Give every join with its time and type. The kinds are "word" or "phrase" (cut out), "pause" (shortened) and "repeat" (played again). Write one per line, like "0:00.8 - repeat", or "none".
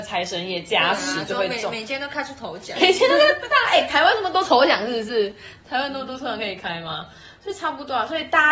0:02.8 - word